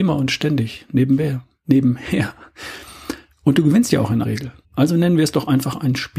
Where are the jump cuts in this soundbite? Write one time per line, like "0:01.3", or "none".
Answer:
0:04.2
0:04.6